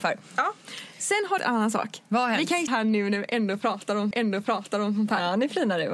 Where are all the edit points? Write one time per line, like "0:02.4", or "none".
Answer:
0:01.4
0:02.7
0:04.1